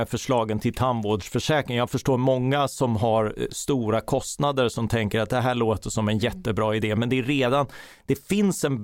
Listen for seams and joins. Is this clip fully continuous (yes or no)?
yes